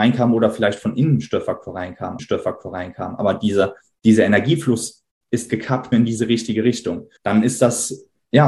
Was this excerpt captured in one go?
no; 3 cuts; at 2.2 s, 5.9 s, 7.2 s

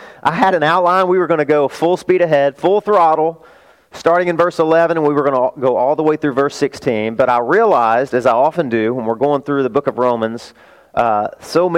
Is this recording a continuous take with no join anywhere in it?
yes; 0 cuts

